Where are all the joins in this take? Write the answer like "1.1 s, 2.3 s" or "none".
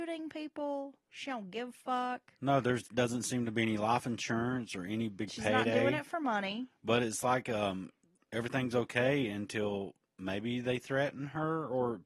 none